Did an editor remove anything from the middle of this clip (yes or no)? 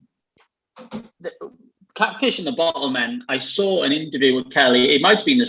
yes